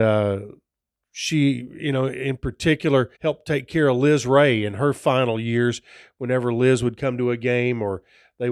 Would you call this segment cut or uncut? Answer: cut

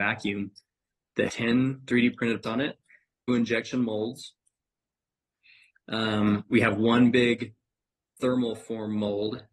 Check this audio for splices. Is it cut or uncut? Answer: cut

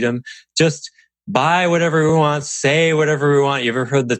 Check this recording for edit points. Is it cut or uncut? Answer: uncut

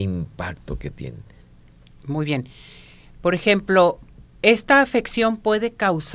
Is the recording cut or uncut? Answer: uncut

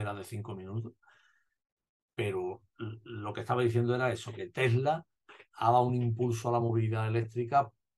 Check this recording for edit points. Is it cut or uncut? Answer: uncut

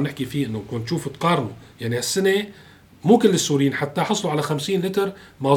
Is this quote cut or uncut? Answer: uncut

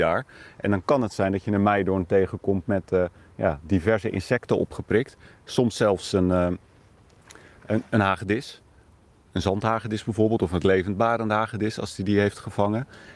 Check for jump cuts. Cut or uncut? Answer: uncut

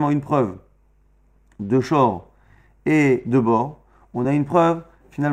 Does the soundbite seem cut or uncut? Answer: uncut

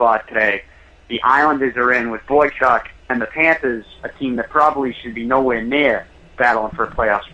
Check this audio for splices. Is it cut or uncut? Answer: uncut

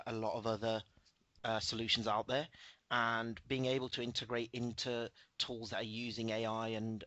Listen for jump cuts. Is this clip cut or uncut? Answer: uncut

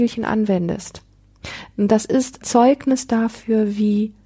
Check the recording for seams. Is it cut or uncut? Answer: cut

